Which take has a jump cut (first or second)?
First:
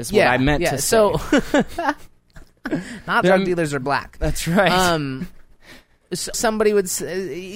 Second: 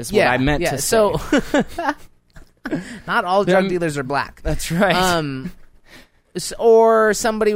first